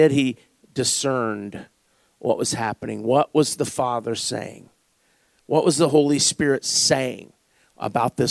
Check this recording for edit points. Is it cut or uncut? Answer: uncut